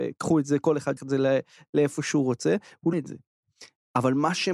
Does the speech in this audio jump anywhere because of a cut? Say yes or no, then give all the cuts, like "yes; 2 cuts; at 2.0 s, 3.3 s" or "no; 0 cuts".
yes; 2 cuts; at 1.0 s, 2.9 s